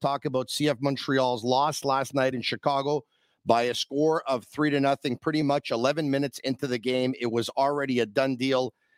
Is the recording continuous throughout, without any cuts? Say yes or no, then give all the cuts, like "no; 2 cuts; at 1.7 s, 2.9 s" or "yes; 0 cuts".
yes; 0 cuts